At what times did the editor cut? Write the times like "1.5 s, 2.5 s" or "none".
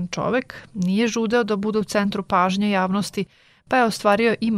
none